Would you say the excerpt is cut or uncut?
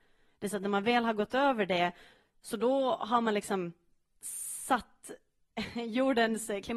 uncut